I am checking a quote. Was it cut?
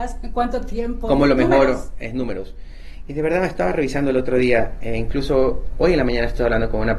no; 0 cuts

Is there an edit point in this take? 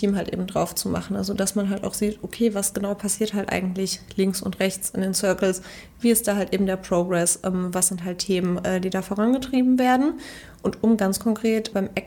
no; 0 cuts

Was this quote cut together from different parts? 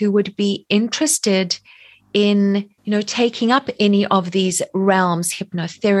yes; 1 cut; at 2.8 s

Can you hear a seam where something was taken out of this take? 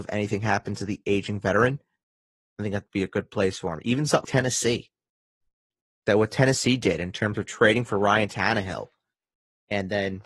yes; 1 cut; at 4.2 s

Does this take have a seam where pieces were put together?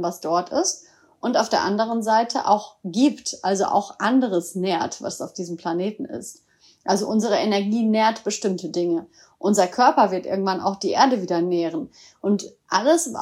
no; 0 cuts

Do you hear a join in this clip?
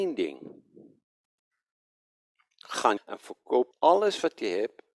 yes; 2 cuts; at 3.0 s, 3.7 s

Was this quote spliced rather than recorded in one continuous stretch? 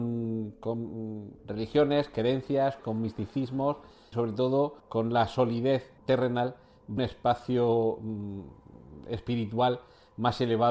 yes; 6 cuts; at 1.4 s, 2.8 s, 4.1 s, 4.8 s, 6.0 s, 7.0 s

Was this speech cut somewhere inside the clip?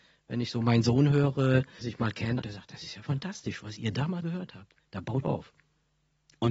yes; 4 cuts; at 1.8 s, 2.4 s, 4.2 s, 5.2 s

